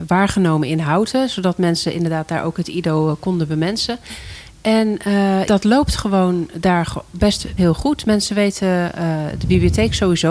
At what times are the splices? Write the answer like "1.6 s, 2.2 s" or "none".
5.5 s, 7.6 s